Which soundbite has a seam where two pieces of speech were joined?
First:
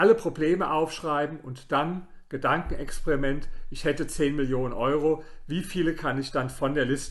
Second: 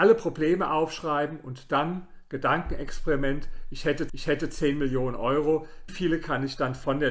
second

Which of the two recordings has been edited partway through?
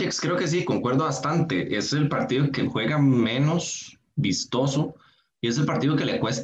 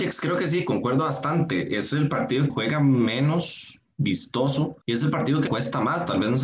second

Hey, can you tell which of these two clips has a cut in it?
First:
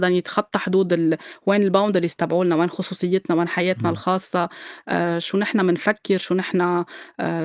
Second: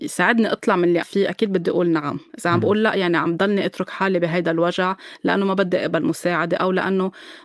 second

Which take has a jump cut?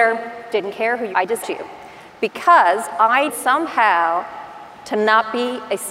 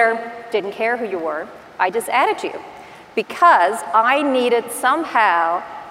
first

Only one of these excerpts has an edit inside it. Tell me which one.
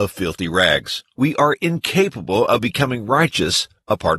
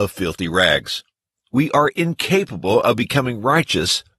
first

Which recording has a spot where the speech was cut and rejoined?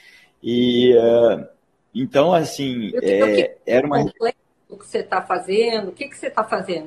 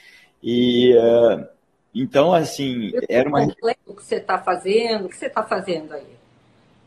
second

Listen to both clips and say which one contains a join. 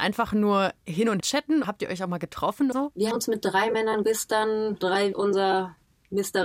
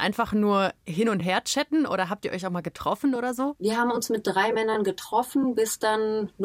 first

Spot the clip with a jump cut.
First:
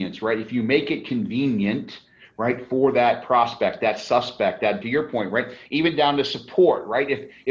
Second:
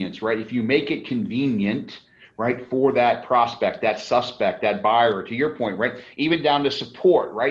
first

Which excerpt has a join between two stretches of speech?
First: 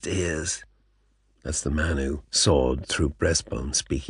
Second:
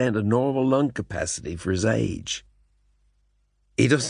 first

